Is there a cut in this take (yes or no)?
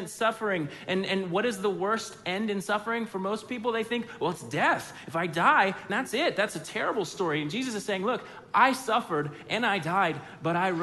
yes